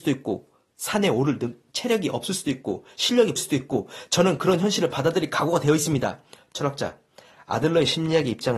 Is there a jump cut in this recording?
yes; 2 cuts; at 2.4 s, 3.4 s

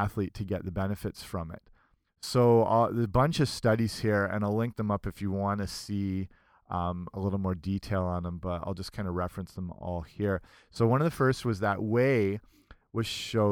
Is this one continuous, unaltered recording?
yes; 0 cuts

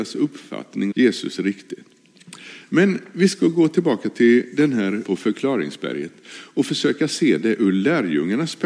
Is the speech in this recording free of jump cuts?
no; 2 cuts; at 0.9 s, 5.0 s

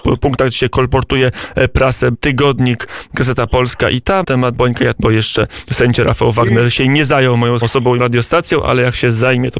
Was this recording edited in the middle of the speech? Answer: yes; 6 cuts; at 2.1 s, 4.2 s, 4.5 s, 4.9 s, 7.6 s, 8.0 s

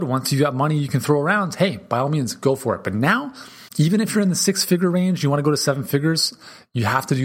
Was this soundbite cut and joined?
yes; 1 cut; at 3.7 s

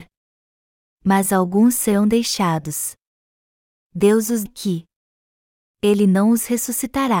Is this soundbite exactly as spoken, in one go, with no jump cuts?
no; 1 cut; at 4.5 s

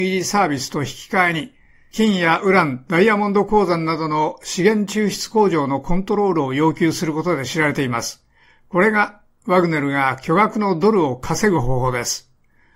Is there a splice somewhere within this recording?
no; 0 cuts

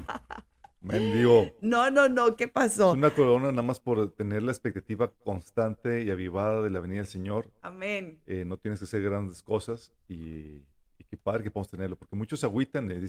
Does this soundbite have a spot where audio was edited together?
no; 0 cuts

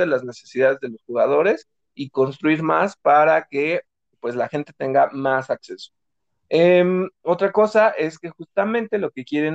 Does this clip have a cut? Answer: no; 0 cuts

